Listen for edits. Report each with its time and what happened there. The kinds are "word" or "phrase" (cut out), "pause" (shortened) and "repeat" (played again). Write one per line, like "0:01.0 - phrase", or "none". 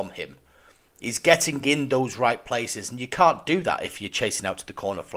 none